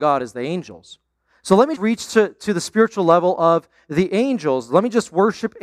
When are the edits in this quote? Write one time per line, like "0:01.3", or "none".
0:01.8